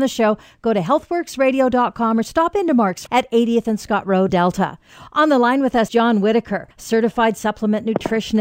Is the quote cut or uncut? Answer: cut